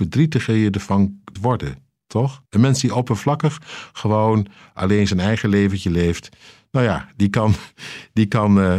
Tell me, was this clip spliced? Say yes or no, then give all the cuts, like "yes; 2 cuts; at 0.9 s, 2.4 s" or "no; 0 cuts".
yes; 2 cuts; at 1.4 s, 2.5 s